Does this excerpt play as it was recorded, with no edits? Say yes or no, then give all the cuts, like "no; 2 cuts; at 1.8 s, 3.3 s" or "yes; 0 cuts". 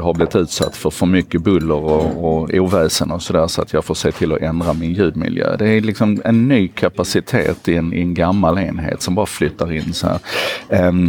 yes; 0 cuts